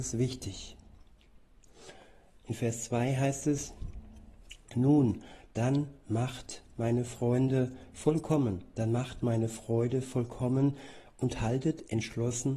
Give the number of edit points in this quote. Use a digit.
0